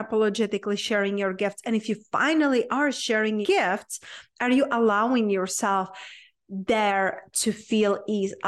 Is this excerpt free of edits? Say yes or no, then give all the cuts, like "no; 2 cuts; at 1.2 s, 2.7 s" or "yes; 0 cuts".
no; 1 cut; at 3.4 s